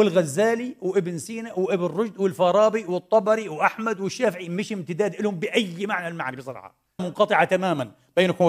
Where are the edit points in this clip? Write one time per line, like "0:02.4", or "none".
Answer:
0:07.0